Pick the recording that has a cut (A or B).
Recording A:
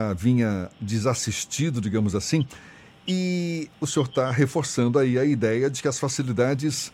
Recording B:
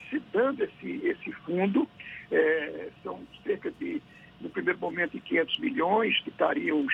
B